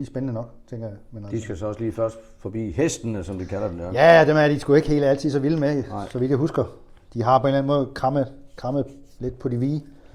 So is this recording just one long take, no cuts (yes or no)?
no